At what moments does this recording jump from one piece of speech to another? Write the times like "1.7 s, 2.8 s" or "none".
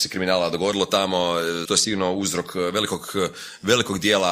1.6 s